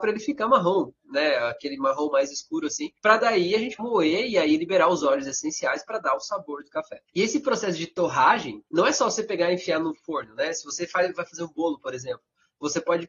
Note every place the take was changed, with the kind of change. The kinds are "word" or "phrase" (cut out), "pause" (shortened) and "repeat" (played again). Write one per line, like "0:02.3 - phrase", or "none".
0:03.0 - pause
0:03.8 - word
0:07.1 - pause
0:08.7 - pause